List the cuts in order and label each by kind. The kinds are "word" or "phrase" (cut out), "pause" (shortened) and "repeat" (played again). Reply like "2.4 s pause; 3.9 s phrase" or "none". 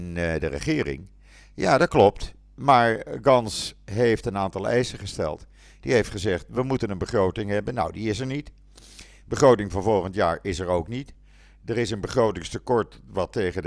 none